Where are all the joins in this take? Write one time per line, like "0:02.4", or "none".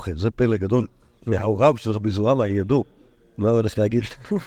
none